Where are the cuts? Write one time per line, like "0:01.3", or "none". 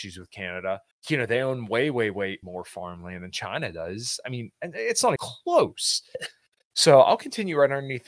0:00.9
0:02.4
0:05.2